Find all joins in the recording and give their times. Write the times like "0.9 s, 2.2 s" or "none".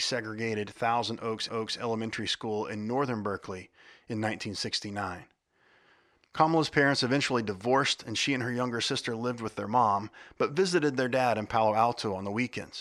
1.5 s